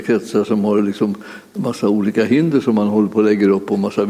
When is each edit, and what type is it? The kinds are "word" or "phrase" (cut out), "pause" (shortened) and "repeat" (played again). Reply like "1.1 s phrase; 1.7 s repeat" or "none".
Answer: none